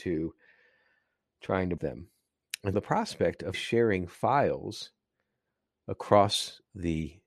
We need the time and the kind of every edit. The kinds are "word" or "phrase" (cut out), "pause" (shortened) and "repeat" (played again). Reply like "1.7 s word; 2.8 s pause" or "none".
1.8 s word; 2.7 s word; 3.5 s word

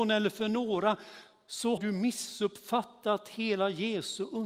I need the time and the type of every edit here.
1.8 s word

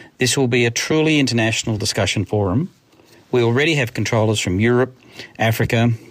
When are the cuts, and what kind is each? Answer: none

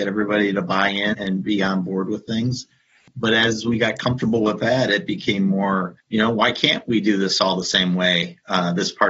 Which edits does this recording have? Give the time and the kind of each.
1.1 s word; 6.0 s pause

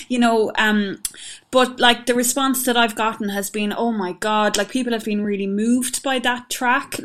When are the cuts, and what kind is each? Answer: none

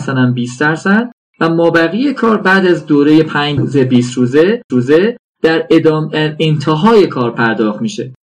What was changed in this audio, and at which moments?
3.6 s word; 4.7 s repeat

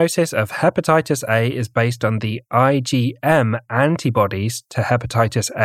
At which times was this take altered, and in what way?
none

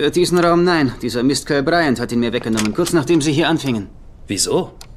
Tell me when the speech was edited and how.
none

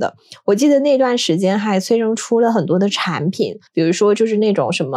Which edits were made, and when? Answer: 3.7 s pause

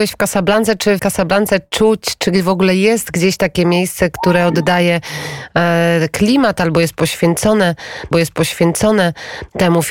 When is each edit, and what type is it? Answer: 1.0 s word; 8.1 s repeat

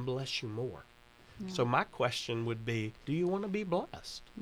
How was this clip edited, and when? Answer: 3.0 s pause

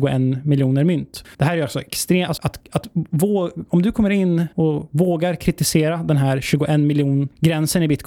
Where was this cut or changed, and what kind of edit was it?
2.4 s word

